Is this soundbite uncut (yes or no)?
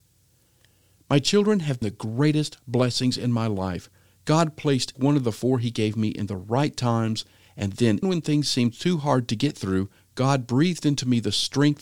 no